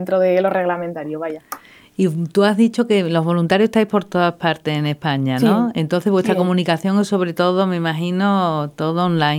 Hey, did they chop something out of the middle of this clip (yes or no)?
no